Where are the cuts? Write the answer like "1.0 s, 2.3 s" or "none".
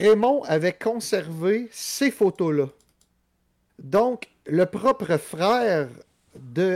none